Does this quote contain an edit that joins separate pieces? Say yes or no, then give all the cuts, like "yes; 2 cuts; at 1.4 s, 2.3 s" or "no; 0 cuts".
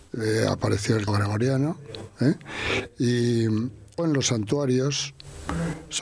yes; 2 cuts; at 1.1 s, 4.0 s